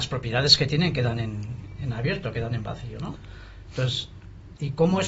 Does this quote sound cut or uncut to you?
uncut